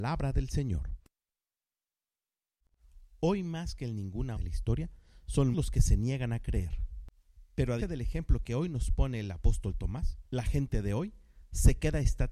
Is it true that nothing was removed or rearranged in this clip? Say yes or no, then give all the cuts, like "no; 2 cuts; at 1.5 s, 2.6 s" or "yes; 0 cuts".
no; 4 cuts; at 4.3 s, 5.5 s, 7.8 s, 10.3 s